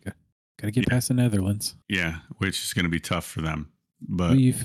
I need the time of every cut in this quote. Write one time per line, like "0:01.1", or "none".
0:01.8